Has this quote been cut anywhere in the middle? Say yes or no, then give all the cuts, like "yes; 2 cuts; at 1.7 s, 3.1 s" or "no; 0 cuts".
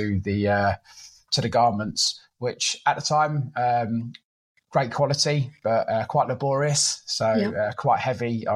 no; 0 cuts